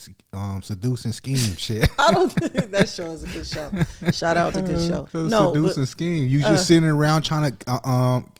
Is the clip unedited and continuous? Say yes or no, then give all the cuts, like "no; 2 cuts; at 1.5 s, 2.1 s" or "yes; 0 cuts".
no; 2 cuts; at 4.5 s, 5.1 s